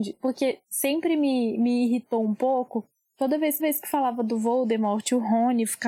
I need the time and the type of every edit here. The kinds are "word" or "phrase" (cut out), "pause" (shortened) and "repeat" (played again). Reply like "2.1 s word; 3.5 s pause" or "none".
3.6 s repeat